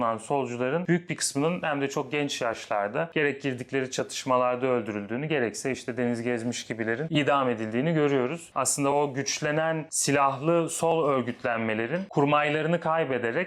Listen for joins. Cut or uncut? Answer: uncut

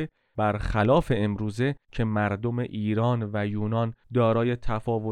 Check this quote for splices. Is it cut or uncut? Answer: uncut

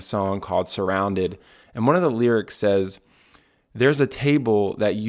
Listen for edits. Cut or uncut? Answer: uncut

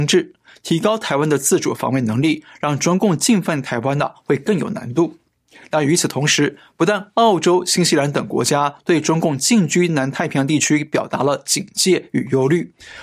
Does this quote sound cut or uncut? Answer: uncut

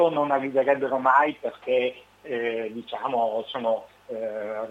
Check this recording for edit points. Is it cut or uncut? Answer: uncut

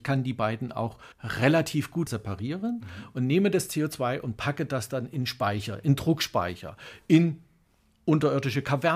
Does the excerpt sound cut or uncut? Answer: cut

